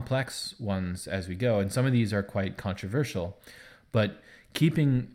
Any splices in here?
no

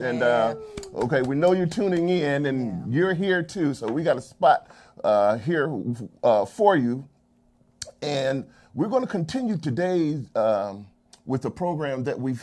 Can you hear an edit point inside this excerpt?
no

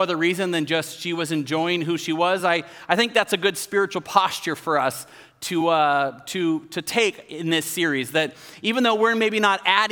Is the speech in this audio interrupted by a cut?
no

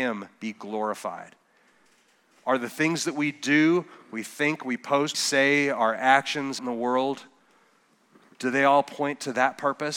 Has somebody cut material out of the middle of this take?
yes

